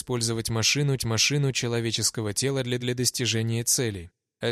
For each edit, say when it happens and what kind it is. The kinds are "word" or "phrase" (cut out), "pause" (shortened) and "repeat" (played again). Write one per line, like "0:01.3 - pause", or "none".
0:01.0 - repeat
0:02.8 - repeat